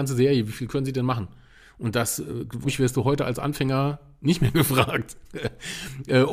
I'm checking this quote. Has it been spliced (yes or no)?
yes